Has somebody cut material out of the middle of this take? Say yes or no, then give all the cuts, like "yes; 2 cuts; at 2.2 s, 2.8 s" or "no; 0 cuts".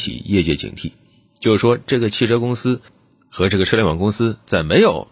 no; 0 cuts